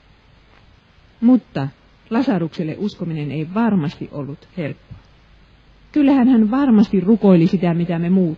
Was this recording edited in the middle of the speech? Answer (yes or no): no